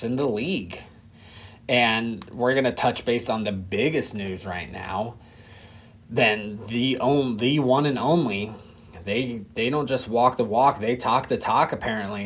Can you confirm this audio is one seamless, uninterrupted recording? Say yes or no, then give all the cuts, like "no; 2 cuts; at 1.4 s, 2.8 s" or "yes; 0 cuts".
yes; 0 cuts